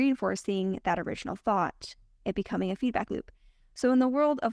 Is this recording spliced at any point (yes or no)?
no